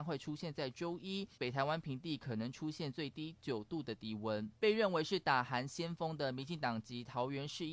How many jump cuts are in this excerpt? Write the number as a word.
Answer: two